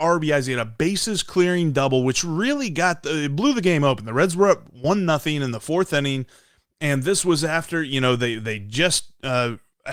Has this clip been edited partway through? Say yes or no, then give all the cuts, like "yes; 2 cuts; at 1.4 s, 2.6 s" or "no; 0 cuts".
no; 0 cuts